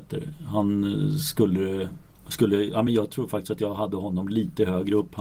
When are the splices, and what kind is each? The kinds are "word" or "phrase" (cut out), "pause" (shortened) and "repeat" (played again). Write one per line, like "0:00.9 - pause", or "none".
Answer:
none